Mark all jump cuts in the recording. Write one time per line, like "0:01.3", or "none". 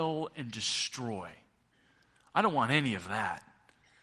none